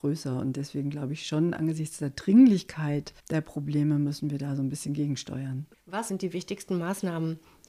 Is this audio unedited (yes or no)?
no